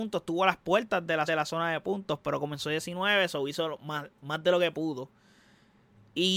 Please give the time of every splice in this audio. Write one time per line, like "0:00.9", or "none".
0:01.3

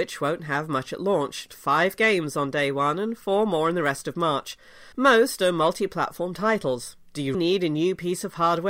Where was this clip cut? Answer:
0:01.5
0:04.9
0:07.3

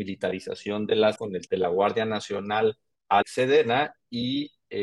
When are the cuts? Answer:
0:01.2
0:01.5
0:03.2

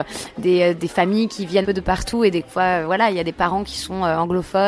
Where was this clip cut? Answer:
0:01.6

